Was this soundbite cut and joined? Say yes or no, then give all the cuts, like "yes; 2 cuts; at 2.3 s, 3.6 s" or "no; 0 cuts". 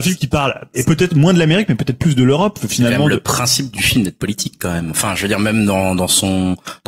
no; 0 cuts